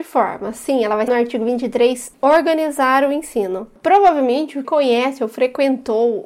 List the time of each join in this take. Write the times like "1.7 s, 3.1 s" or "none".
1.1 s, 2.1 s, 4.6 s